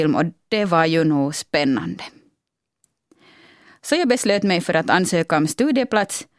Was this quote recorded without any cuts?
yes; 0 cuts

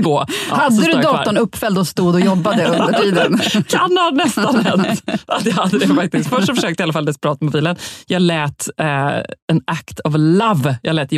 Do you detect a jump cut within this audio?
no; 0 cuts

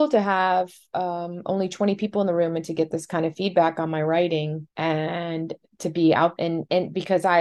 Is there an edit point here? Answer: yes; 2 cuts; at 4.7 s, 6.4 s

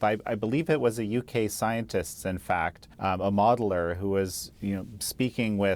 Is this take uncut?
no; 1 cut; at 2.9 s

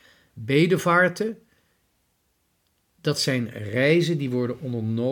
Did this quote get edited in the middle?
no; 0 cuts

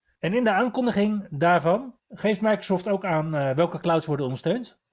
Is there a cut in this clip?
yes; 1 cut; at 2.0 s

